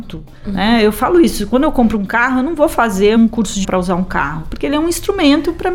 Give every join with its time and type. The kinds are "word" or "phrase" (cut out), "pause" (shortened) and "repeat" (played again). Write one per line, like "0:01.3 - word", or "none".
0:03.2 - word
0:03.6 - word